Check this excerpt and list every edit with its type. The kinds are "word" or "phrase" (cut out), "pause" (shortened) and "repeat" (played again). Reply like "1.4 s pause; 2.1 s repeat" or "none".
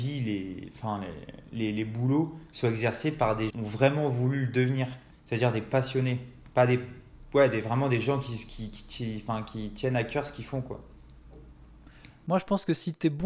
3.5 s phrase; 5.1 s pause